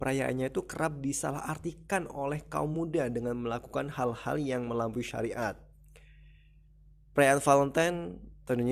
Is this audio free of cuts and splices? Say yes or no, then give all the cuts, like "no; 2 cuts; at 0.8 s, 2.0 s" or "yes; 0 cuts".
yes; 0 cuts